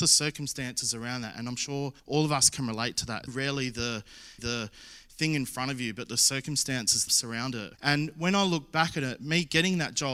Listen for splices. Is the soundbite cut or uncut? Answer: cut